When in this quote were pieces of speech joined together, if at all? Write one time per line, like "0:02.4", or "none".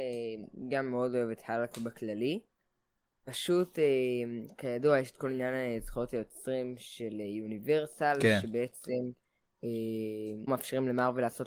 0:10.5